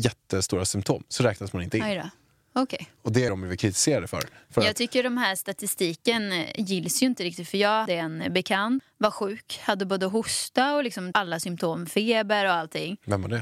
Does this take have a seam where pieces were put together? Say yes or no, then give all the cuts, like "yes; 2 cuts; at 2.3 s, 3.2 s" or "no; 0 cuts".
yes; 4 cuts; at 3.3 s, 7.9 s, 8.8 s, 11.1 s